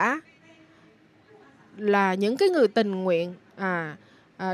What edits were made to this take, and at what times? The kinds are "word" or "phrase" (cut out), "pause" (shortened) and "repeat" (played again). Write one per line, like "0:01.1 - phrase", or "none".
0:03.4 - pause